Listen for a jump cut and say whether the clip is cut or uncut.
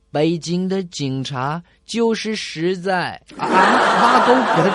uncut